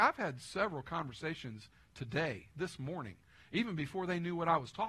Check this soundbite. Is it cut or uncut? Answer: uncut